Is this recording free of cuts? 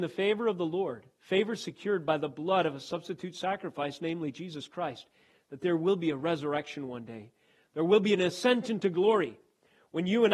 yes; 0 cuts

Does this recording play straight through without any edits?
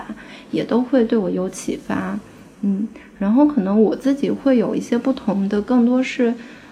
yes; 0 cuts

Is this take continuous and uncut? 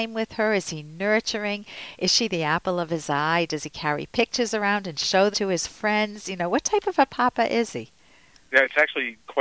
no; 1 cut; at 5.3 s

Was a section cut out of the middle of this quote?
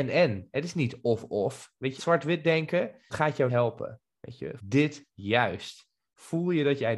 yes; 4 cuts; at 2.0 s, 3.1 s, 3.5 s, 4.6 s

